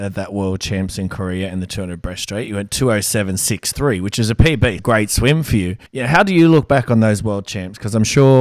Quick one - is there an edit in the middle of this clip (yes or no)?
yes